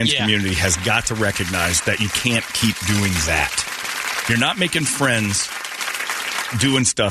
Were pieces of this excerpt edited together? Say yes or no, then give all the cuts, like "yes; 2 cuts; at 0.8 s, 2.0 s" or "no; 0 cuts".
no; 0 cuts